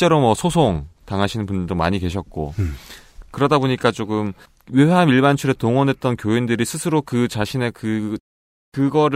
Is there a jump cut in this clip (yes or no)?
no